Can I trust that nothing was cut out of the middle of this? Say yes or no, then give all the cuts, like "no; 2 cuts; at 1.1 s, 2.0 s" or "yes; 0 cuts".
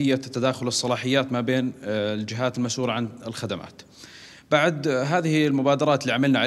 yes; 0 cuts